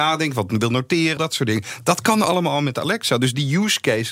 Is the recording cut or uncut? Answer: cut